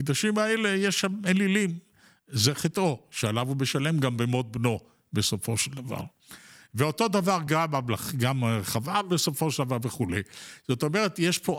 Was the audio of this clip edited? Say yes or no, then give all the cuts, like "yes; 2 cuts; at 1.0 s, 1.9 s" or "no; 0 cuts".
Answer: no; 0 cuts